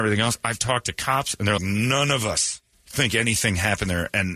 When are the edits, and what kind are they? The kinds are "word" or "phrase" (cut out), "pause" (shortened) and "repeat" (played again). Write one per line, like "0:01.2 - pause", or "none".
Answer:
0:01.6 - word
0:02.7 - pause